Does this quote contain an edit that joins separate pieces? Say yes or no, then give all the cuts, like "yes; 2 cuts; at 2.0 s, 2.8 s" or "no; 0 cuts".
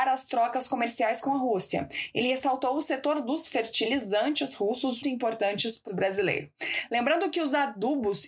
yes; 2 cuts; at 5.0 s, 5.9 s